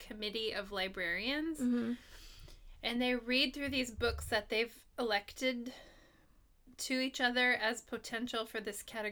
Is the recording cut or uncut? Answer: uncut